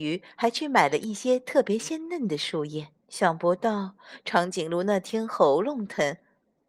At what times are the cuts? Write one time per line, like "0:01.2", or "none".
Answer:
0:03.0